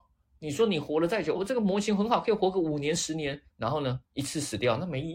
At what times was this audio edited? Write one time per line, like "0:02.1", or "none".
0:01.4
0:03.5
0:04.1